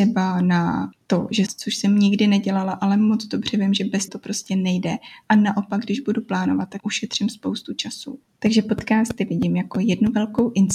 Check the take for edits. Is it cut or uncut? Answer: cut